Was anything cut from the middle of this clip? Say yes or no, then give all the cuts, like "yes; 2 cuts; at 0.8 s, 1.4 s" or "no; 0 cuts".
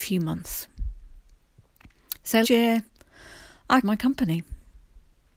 yes; 2 cuts; at 2.4 s, 3.8 s